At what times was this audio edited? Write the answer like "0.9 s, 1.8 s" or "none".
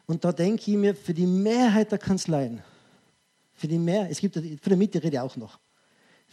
none